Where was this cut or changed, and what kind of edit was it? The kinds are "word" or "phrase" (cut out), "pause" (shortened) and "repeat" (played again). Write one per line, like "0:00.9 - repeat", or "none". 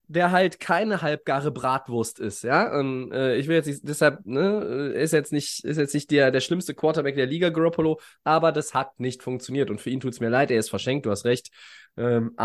none